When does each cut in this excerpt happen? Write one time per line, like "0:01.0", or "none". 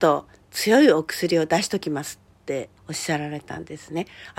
0:02.8